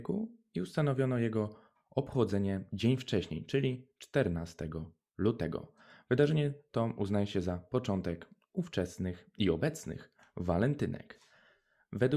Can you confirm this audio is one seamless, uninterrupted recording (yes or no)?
yes